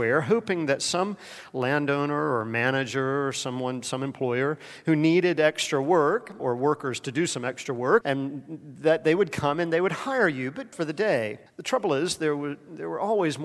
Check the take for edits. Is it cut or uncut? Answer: cut